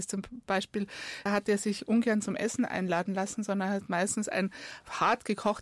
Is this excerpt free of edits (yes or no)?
no